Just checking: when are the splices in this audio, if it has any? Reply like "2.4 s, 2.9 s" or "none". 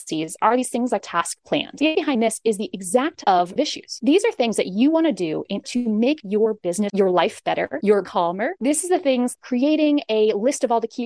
1.0 s, 1.9 s, 3.2 s, 3.6 s, 5.6 s, 6.9 s, 8.0 s, 9.3 s